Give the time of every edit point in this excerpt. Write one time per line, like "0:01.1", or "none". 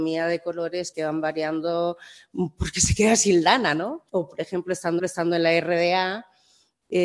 0:00.9
0:04.1
0:05.0